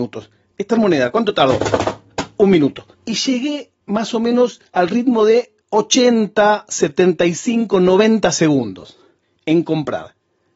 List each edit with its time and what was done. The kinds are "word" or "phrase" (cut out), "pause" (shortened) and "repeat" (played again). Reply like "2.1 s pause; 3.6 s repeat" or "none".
2.9 s pause; 3.8 s pause; 4.7 s pause; 5.6 s pause; 9.2 s pause